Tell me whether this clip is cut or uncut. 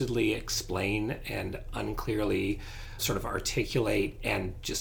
cut